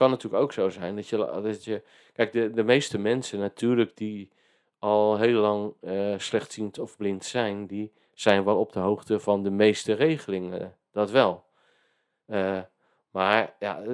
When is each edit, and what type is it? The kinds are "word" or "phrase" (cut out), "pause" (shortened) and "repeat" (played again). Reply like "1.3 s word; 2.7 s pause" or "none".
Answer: none